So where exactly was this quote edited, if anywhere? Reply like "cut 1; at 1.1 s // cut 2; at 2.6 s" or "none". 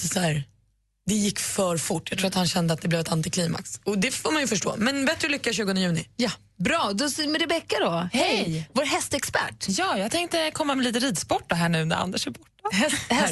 none